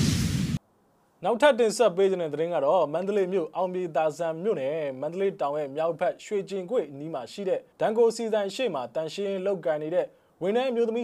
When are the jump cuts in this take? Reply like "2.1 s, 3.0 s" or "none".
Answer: 7.7 s